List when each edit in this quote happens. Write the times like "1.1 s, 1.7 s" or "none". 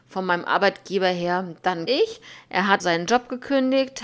1.9 s, 2.8 s